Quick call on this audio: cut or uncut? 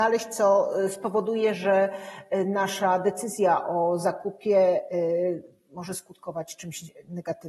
uncut